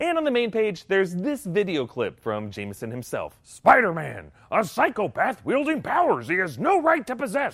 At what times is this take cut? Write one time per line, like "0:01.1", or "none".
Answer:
none

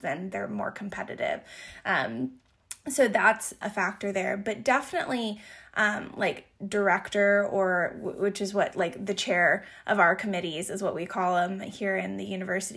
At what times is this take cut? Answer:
0:03.6

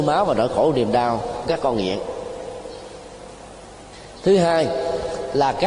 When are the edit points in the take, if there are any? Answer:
0:01.4

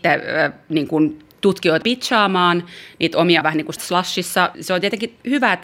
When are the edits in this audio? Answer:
0:01.8
0:03.4
0:03.8
0:04.5

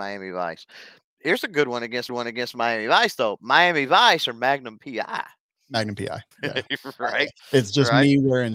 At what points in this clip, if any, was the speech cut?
0:02.1
0:06.3
0:07.4

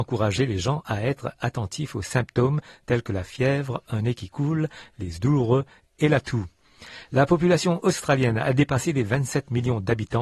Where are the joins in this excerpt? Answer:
0:05.2

